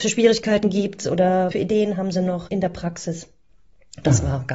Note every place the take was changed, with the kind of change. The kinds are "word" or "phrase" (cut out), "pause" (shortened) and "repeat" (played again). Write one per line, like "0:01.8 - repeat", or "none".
0:01.5 - word
0:02.5 - word